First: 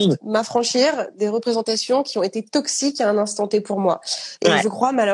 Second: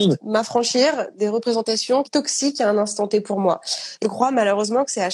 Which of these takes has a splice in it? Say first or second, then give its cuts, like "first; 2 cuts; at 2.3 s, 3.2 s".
second; 2 cuts; at 2.0 s, 4.0 s